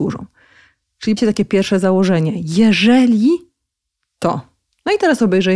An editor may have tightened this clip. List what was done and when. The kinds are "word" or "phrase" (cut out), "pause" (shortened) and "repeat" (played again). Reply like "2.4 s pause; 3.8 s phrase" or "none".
1.2 s word